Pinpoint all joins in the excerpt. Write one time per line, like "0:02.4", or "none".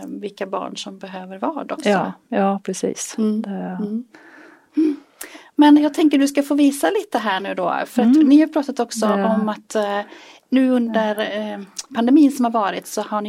none